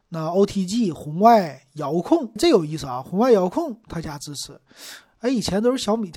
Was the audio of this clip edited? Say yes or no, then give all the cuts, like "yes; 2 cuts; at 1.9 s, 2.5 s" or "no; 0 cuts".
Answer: yes; 1 cut; at 2.4 s